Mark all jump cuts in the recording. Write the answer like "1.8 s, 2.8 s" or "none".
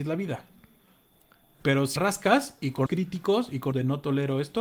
2.0 s, 2.9 s, 3.7 s